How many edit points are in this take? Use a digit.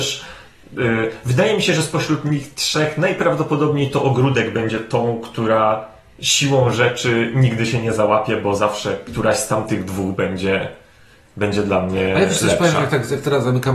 0